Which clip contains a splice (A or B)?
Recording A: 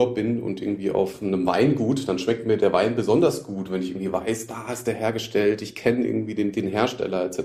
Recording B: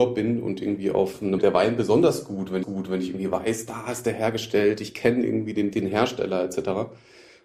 B